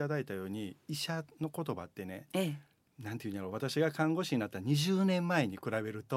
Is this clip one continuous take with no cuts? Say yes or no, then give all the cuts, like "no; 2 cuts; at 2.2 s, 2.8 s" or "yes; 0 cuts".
yes; 0 cuts